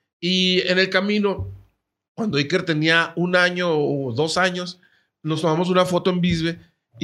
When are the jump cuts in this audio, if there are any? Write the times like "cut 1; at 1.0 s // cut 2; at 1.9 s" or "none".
none